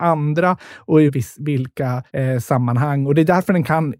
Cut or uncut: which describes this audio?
cut